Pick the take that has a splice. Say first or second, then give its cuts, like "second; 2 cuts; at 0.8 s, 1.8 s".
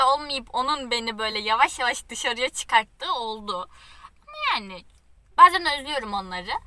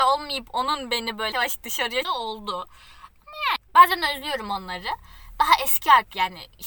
second; 3 cuts; at 1.3 s, 2.0 s, 3.6 s